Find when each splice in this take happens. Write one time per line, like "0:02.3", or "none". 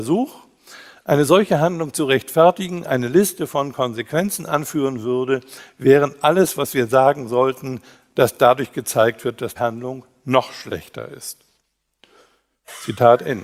0:09.6